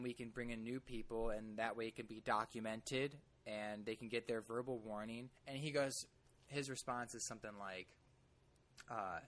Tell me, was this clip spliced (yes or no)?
yes